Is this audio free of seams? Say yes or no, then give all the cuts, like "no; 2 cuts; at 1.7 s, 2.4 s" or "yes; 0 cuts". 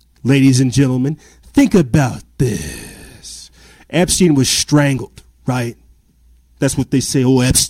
yes; 0 cuts